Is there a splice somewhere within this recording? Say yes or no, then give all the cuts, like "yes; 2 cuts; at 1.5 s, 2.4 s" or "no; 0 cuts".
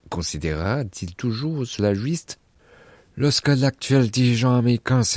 no; 0 cuts